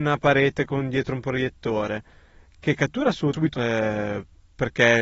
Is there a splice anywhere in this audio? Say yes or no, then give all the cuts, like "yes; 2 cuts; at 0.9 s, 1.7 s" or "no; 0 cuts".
yes; 1 cut; at 3.5 s